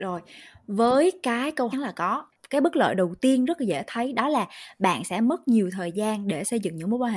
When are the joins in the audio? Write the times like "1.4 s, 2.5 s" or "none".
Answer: 1.7 s